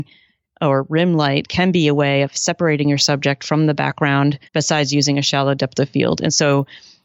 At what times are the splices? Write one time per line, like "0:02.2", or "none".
0:04.5